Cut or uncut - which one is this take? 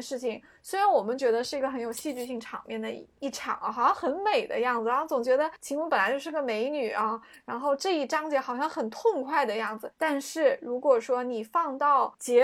uncut